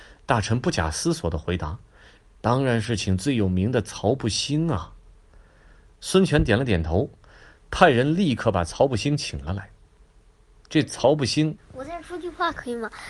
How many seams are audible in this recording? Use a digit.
1